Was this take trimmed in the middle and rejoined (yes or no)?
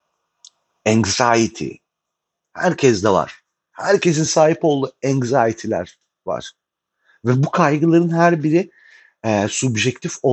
no